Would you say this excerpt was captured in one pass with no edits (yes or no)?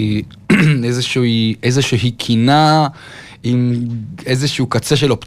yes